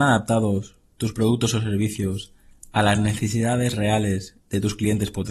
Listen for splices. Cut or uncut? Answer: uncut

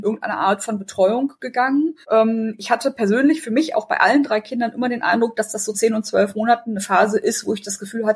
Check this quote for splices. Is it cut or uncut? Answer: cut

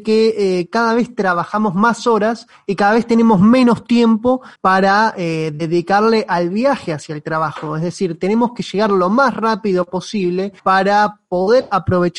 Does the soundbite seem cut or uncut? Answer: cut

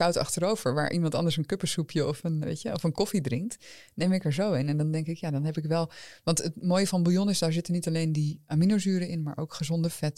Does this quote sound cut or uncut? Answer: cut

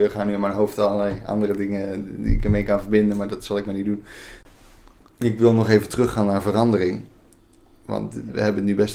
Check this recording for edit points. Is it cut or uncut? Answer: uncut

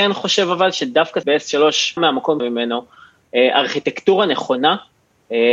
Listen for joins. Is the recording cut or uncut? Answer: cut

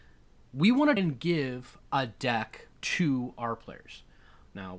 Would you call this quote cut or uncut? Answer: cut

